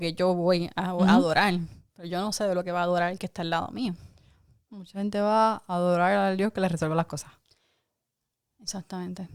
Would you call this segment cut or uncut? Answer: uncut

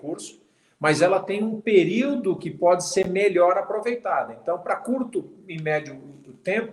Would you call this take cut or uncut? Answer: uncut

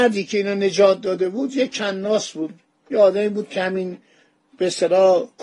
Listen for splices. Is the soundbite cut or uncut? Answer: uncut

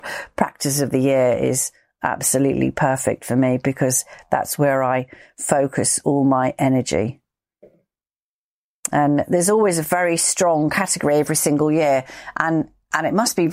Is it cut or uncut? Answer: uncut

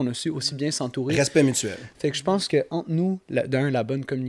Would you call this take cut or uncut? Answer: uncut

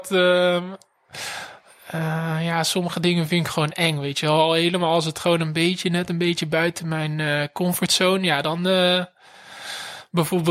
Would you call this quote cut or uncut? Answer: uncut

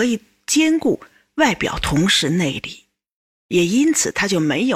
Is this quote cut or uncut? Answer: uncut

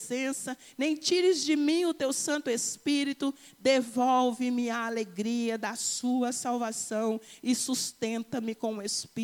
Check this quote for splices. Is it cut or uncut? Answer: uncut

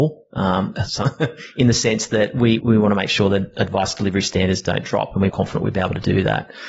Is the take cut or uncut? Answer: cut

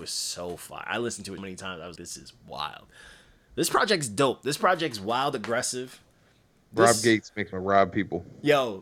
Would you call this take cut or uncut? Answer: cut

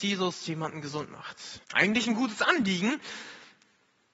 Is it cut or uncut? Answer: cut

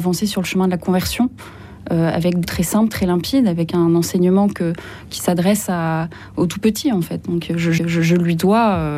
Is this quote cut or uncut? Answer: cut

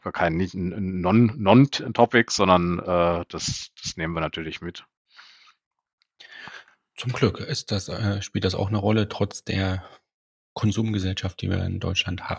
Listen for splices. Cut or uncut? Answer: uncut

